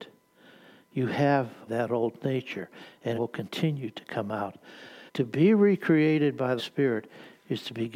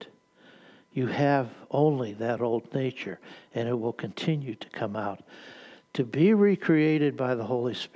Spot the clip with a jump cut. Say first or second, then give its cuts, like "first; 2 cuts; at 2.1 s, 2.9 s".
first; 4 cuts; at 1.7 s, 3.2 s, 5.1 s, 6.6 s